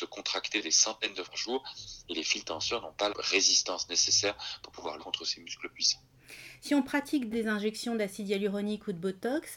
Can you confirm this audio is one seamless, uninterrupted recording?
no; 4 cuts; at 1.2 s, 3.1 s, 5.0 s, 7.3 s

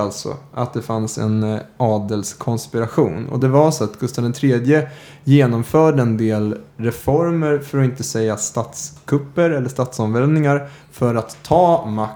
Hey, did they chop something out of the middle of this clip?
no; 0 cuts

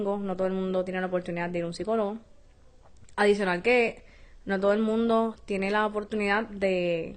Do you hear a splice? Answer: no; 0 cuts

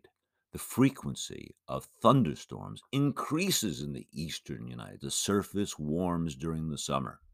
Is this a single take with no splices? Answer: no; 1 cut; at 5.0 s

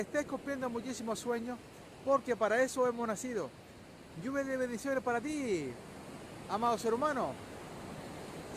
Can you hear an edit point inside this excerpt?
no; 0 cuts

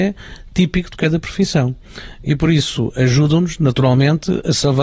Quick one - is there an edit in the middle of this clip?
no; 0 cuts

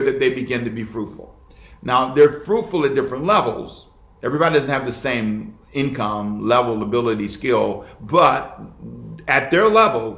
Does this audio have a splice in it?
no; 0 cuts

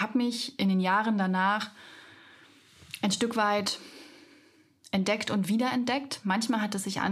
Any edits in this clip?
no; 0 cuts

